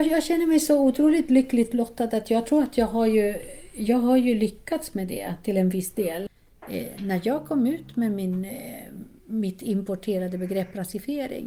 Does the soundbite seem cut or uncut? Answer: uncut